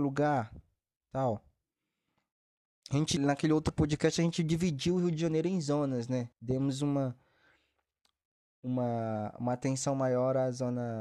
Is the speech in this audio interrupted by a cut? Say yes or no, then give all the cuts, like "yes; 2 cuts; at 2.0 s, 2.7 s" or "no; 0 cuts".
yes; 2 cuts; at 3.2 s, 6.3 s